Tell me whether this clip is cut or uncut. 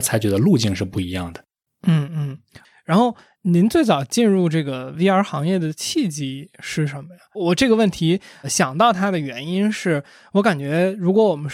uncut